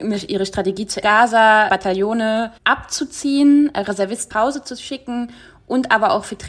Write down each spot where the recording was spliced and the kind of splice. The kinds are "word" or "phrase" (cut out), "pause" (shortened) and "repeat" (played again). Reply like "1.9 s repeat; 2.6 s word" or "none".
1.0 s phrase; 1.7 s word; 2.6 s pause; 4.3 s word